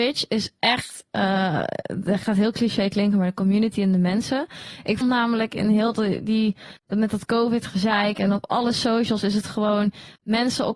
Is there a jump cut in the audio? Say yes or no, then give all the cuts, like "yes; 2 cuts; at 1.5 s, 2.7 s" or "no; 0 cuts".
yes; 1 cut; at 5.0 s